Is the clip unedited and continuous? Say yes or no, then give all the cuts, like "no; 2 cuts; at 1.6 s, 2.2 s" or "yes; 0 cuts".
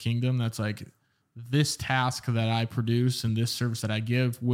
yes; 0 cuts